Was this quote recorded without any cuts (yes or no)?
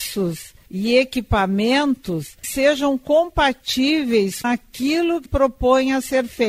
no